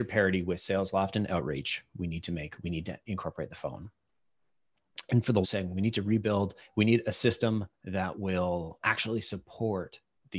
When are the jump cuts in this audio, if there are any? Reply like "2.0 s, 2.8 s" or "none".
5.4 s, 6.6 s, 8.8 s